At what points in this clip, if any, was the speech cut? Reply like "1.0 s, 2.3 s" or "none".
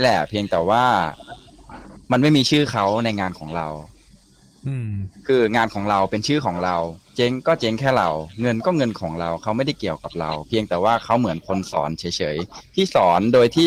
2.0 s